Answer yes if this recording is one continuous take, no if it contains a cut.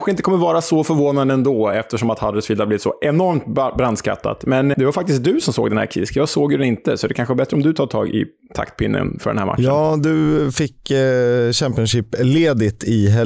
no